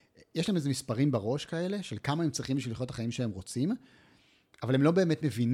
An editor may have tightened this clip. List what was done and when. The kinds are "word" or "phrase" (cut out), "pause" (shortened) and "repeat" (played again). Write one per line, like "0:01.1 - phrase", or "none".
none